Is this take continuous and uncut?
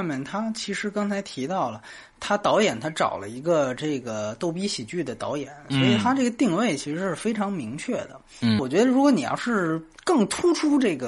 no; 1 cut; at 8.6 s

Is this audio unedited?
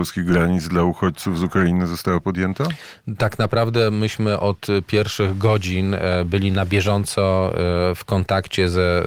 yes; 0 cuts

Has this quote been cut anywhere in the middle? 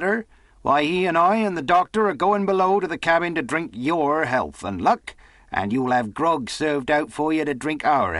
no; 0 cuts

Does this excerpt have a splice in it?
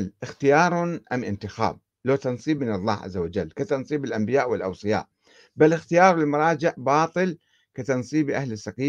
no; 0 cuts

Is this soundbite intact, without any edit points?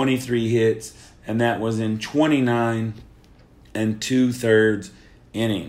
yes; 0 cuts

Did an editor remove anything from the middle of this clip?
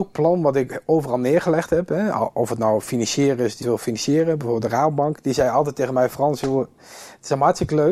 yes; 1 cut; at 3.6 s

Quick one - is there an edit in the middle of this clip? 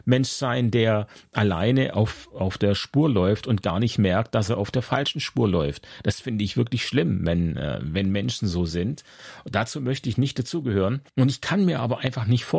yes; 1 cut; at 11.1 s

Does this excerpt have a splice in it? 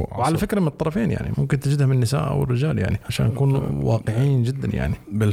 no; 0 cuts

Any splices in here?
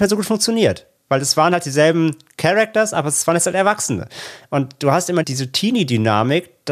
yes; 1 cut; at 5.2 s

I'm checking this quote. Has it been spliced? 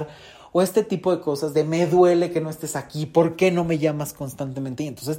no; 0 cuts

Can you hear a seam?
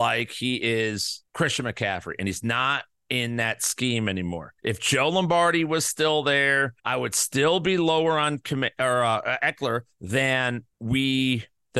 yes; 4 cuts; at 1.3 s, 4.6 s, 6.8 s, 10.7 s

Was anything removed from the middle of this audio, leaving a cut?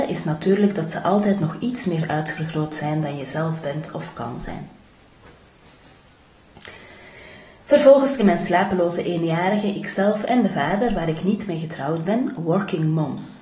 yes; 1 cut; at 8.2 s

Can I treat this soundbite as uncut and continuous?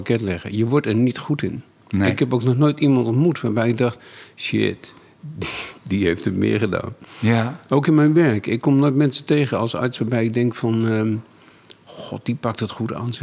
yes; 0 cuts

